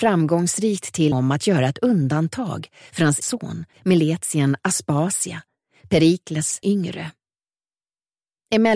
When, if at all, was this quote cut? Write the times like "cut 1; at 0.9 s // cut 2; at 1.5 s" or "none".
cut 1; at 1.1 s // cut 2; at 3.2 s // cut 3; at 3.7 s // cut 4; at 6.6 s

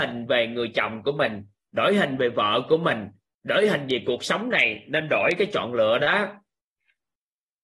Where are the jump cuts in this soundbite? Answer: none

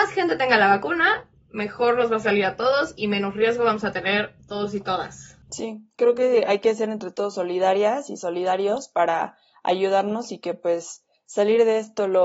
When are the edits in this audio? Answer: none

